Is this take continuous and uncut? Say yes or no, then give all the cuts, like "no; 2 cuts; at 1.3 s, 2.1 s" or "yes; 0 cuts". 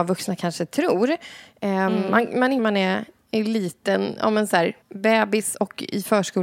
no; 2 cuts; at 2.6 s, 4.8 s